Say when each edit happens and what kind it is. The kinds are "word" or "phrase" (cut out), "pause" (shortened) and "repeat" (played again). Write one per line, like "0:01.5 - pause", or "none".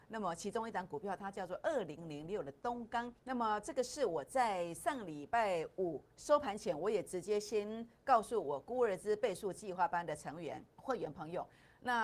0:03.2 - pause
0:06.1 - pause
0:10.7 - pause

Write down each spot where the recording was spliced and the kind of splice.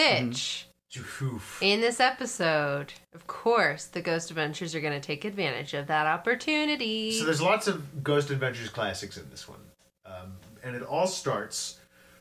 none

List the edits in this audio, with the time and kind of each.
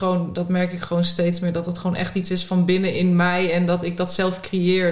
none

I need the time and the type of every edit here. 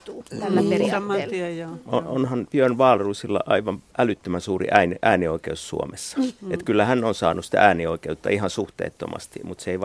0:03.9 - pause

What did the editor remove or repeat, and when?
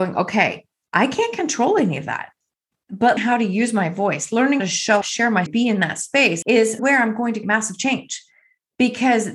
0:03.2 - word
0:04.6 - word
0:05.0 - word
0:05.5 - word
0:06.8 - word
0:07.4 - word

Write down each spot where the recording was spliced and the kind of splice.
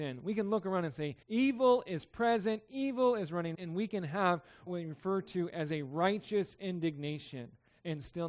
0:01.2 - pause
0:03.5 - word
0:04.7 - word

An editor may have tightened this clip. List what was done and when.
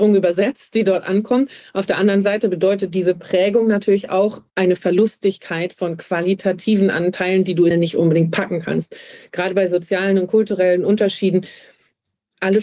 0:04.5 - pause
0:07.7 - phrase

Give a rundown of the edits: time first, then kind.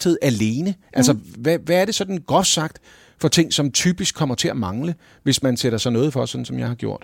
none

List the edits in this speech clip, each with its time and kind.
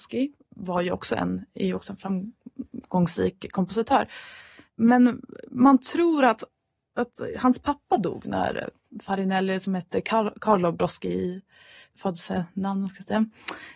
none

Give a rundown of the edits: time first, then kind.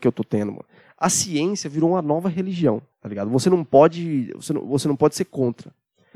0:02.9 - pause

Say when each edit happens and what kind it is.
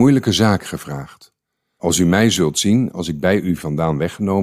none

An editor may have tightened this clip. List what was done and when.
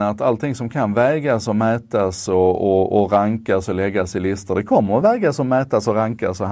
none

